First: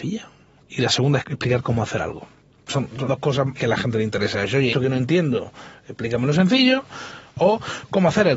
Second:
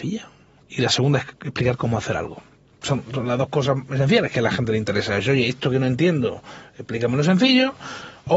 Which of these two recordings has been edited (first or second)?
first